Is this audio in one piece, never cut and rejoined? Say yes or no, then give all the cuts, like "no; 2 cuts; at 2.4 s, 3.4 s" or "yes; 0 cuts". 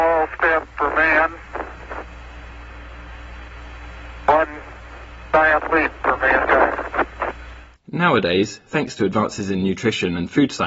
yes; 0 cuts